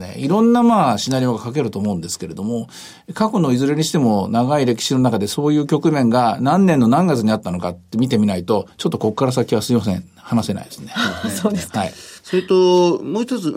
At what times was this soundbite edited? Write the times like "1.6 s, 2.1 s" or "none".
12.2 s